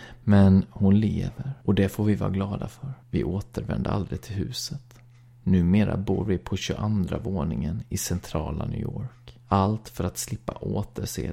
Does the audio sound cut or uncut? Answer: cut